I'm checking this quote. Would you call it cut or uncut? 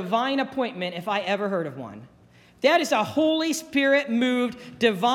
uncut